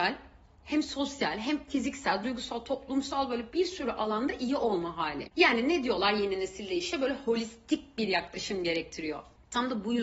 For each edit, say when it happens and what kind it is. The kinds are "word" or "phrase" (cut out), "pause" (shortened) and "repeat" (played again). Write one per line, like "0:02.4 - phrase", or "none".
0:05.3 - pause